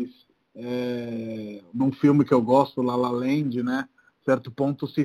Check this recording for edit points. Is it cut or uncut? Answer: uncut